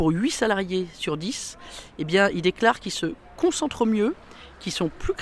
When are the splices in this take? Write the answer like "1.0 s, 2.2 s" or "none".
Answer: none